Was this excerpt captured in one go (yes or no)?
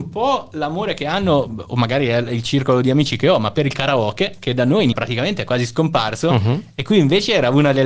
no